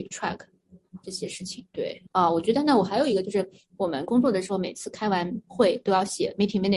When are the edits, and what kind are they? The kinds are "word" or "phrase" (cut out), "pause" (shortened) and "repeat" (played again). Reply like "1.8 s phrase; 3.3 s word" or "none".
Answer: 2.1 s pause